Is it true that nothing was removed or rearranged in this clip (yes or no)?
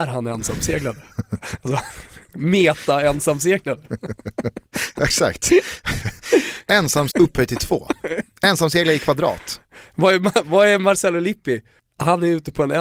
no